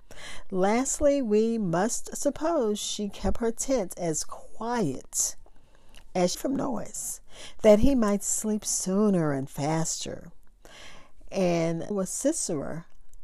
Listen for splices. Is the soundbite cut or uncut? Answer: cut